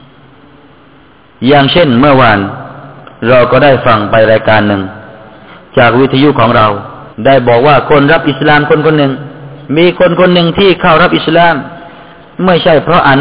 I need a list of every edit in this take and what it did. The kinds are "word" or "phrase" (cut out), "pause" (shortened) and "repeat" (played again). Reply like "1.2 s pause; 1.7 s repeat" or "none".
7.1 s pause; 9.6 s pause